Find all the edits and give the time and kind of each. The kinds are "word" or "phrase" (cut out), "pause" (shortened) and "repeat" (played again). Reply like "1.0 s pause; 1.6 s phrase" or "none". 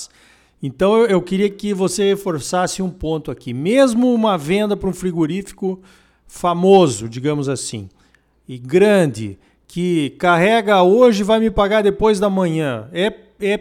none